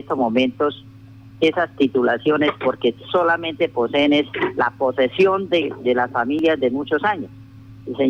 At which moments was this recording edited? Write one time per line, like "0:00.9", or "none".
none